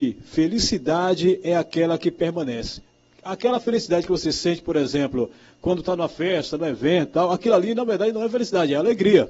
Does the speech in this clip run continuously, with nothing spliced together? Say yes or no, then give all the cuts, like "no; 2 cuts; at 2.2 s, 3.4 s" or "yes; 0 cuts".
yes; 0 cuts